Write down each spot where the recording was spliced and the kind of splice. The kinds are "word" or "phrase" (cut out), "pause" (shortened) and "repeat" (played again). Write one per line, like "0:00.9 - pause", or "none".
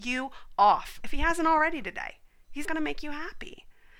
0:02.6 - word